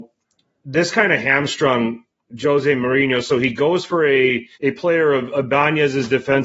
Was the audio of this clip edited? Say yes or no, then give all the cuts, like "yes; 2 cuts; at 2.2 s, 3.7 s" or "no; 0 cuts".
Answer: yes; 1 cut; at 4.5 s